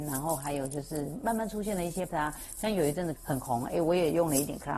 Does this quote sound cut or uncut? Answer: cut